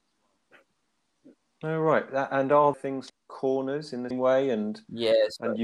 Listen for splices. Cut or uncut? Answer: cut